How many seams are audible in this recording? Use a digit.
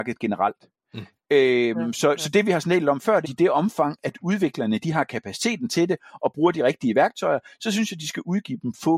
1